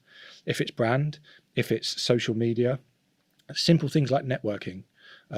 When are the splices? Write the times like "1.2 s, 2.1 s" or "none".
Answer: none